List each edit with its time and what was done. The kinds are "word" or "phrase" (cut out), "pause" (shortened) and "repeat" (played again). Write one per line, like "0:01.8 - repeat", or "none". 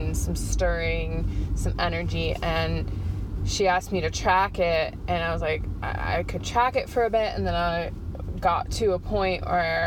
none